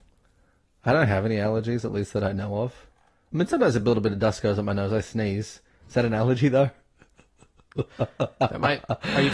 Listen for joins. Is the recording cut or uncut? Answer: uncut